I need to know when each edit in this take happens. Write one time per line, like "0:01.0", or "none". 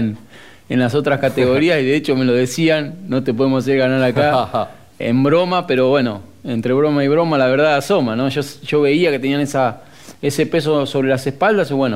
0:05.0